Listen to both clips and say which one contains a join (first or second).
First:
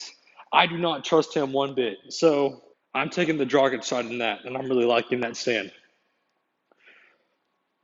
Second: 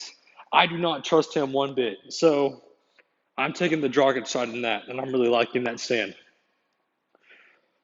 first